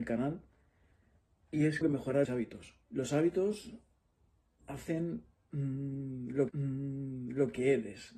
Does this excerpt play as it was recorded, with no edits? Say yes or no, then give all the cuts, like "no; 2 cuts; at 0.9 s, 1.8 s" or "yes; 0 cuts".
no; 4 cuts; at 1.8 s, 2.2 s, 2.8 s, 6.5 s